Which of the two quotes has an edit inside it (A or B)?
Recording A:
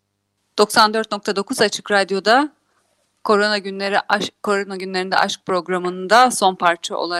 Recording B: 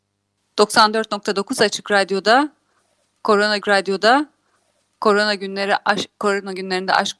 B